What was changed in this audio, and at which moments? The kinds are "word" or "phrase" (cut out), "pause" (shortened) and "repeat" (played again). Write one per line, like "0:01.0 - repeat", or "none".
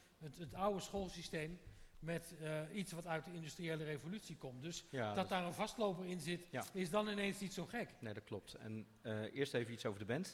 none